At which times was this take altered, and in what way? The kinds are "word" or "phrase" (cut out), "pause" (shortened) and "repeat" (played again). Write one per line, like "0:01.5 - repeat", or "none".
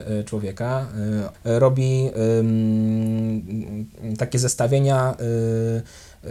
0:01.3 - word